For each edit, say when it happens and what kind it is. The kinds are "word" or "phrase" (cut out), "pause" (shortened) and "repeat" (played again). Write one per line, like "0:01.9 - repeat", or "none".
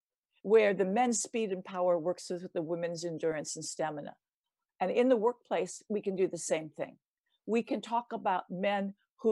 none